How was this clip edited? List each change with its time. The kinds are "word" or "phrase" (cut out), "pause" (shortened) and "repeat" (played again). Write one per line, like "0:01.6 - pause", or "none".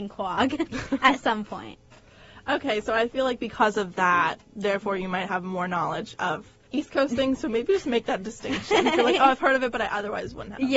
0:06.7 - pause